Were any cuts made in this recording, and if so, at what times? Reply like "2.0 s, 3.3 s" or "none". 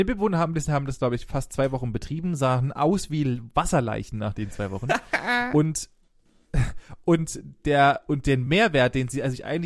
none